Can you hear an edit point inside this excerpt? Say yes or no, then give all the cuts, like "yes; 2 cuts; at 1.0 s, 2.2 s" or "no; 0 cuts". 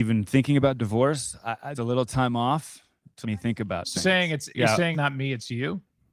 yes; 5 cuts; at 1.7 s, 3.2 s, 3.9 s, 4.5 s, 4.9 s